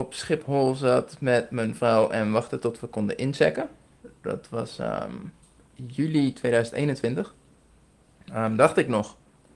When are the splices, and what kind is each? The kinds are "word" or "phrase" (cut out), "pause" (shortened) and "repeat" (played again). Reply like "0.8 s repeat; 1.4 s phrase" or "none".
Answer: 5.4 s pause